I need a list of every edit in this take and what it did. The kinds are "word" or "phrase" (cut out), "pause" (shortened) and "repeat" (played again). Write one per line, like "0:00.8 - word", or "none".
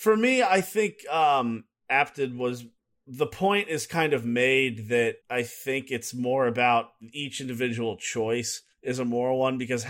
0:02.8 - pause
0:05.2 - pause
0:08.7 - pause